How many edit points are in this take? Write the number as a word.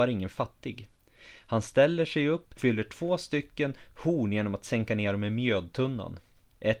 two